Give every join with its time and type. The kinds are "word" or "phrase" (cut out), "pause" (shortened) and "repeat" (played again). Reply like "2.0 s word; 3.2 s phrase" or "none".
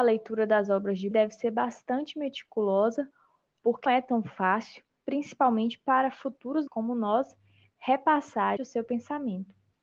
1.1 s word; 3.9 s word; 6.7 s word; 8.6 s word